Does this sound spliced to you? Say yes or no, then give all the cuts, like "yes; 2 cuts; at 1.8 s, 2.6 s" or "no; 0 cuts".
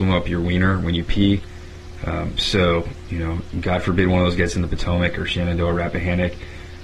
no; 0 cuts